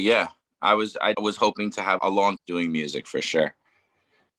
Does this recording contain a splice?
yes; 3 cuts; at 1.1 s, 2.0 s, 2.4 s

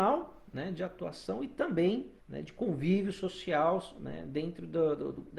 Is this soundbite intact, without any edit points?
no; 1 cut; at 2.2 s

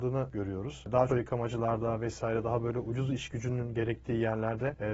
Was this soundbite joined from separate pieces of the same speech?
yes; 1 cut; at 1.1 s

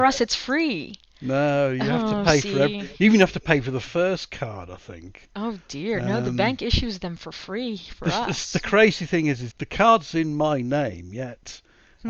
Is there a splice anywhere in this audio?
yes; 1 cut; at 9.5 s

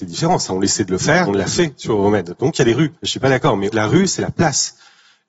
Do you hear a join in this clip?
yes; 3 cuts; at 1.3 s, 3.0 s, 3.7 s

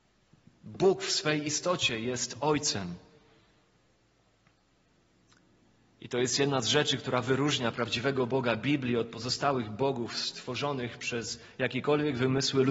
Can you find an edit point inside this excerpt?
no; 0 cuts

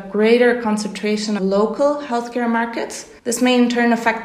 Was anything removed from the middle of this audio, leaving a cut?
yes; 2 cuts; at 1.4 s, 3.2 s

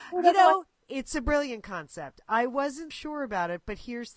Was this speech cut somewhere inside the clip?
yes; 1 cut; at 2.9 s

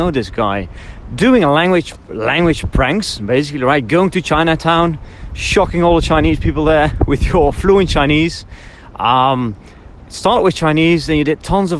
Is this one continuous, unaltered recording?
yes; 0 cuts

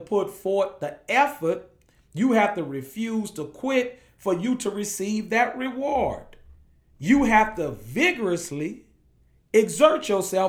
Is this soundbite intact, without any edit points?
yes; 0 cuts

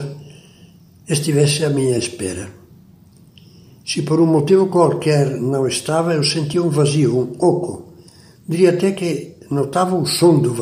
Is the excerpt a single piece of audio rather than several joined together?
yes; 0 cuts

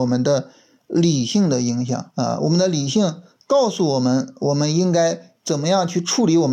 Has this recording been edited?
yes; 1 cut; at 2.1 s

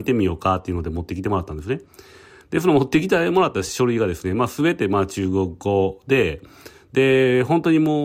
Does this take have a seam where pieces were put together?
no; 0 cuts

